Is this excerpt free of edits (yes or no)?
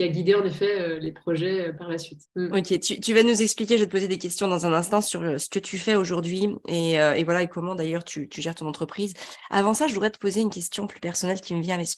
no